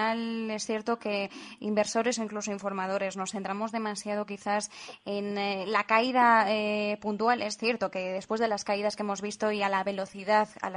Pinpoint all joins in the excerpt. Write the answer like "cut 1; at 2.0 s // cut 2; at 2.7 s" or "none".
none